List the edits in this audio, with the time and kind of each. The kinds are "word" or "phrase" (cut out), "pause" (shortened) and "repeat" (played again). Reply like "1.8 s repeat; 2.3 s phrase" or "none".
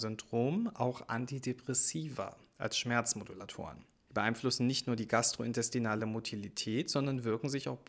none

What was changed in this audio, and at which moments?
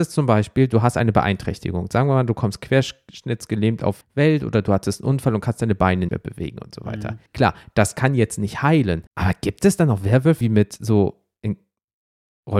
4.0 s word; 6.1 s word; 7.3 s pause; 9.1 s pause; 10.4 s word

